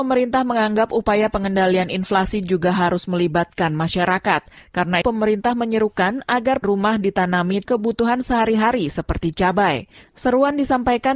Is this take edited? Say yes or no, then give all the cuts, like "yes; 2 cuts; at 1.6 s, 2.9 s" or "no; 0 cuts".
yes; 3 cuts; at 5.0 s, 6.6 s, 7.6 s